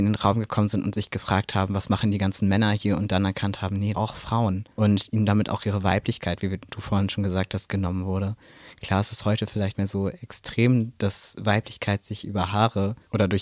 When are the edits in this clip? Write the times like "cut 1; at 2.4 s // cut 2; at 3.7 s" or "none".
cut 1; at 3.9 s // cut 2; at 9.7 s